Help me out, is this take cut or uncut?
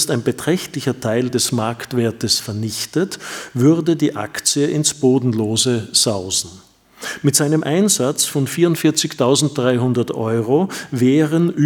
uncut